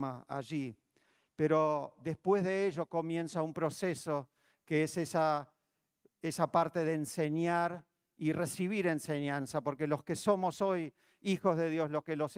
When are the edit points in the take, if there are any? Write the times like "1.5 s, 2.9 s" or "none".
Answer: none